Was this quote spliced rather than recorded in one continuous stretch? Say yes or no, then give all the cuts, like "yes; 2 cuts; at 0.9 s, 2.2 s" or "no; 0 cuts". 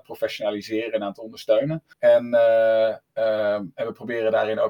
yes; 1 cut; at 1.9 s